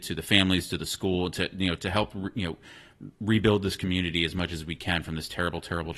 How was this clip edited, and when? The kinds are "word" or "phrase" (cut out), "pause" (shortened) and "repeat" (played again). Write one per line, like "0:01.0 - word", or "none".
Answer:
0:03.1 - pause